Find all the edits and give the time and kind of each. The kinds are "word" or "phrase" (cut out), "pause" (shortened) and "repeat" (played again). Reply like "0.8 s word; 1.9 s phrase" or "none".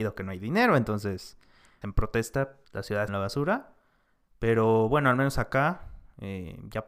1.8 s word; 2.6 s word; 3.1 s phrase